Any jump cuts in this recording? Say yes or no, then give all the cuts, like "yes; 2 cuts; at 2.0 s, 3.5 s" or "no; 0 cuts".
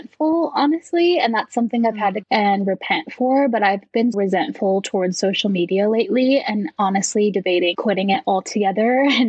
yes; 3 cuts; at 2.2 s, 4.1 s, 7.7 s